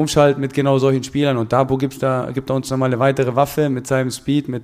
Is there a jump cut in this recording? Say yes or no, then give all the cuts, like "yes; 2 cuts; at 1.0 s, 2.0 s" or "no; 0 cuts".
no; 0 cuts